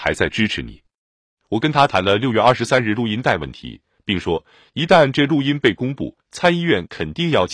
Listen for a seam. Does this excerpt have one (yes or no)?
no